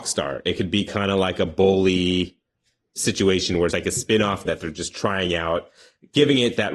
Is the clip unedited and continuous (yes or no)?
no